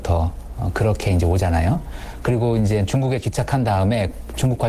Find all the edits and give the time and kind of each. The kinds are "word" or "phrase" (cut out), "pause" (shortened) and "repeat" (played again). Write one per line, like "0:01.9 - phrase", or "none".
none